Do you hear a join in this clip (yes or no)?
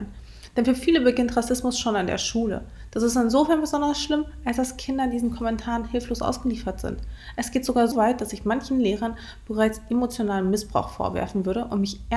yes